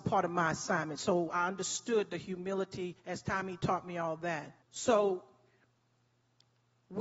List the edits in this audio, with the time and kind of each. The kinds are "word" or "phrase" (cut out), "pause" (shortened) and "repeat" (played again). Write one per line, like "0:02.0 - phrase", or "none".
0:03.0 - pause
0:04.6 - pause